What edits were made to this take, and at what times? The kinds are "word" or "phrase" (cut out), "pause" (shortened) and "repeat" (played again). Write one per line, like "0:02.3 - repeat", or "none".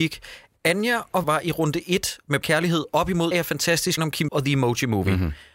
0:01.2 - word
0:02.4 - word
0:03.3 - word
0:04.0 - word
0:04.3 - word